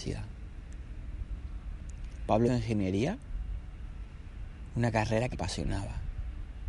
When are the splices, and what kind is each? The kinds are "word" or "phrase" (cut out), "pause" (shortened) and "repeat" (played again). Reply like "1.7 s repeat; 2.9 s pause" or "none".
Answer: 2.5 s word; 5.3 s phrase